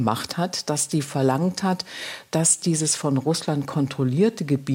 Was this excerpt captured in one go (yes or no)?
yes